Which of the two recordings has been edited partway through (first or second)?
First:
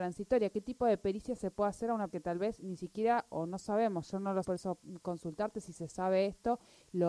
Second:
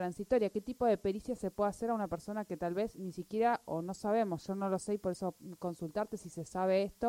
first